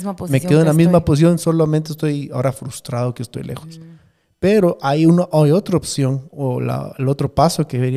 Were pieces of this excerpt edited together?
no; 0 cuts

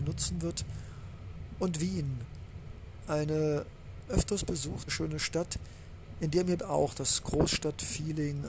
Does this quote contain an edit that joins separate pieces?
yes; 3 cuts; at 4.1 s, 4.9 s, 6.6 s

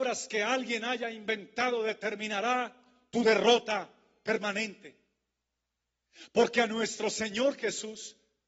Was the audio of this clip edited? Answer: no; 0 cuts

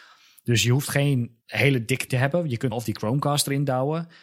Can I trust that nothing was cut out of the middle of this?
no; 3 cuts; at 1.4 s, 2.1 s, 2.7 s

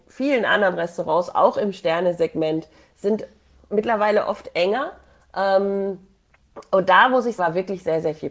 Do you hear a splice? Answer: yes; 1 cut; at 7.4 s

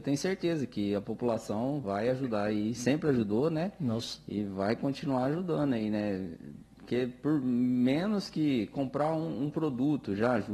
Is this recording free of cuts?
yes; 0 cuts

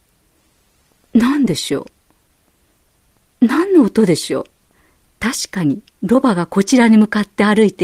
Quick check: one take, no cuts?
no; 2 cuts; at 4.7 s, 5.9 s

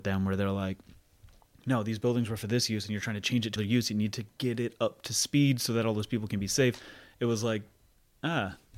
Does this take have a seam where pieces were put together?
yes; 1 cut; at 3.6 s

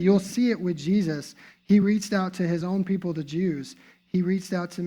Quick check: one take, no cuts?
yes; 0 cuts

